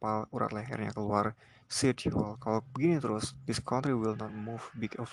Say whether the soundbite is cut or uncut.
uncut